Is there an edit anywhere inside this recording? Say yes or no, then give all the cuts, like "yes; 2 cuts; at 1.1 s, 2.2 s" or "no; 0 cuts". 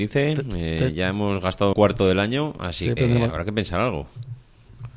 yes; 2 cuts; at 1.7 s, 3.0 s